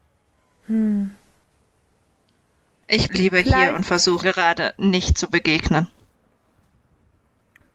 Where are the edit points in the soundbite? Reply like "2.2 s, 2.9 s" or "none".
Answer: 3.1 s, 4.2 s